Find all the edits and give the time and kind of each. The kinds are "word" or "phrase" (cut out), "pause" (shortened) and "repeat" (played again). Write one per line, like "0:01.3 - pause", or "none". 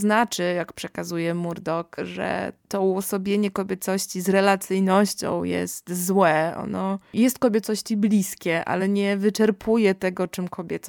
none